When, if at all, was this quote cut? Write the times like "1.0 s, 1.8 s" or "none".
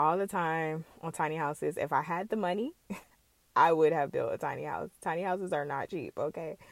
3.0 s